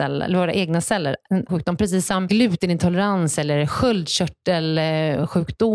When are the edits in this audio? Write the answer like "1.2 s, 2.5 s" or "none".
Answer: 1.5 s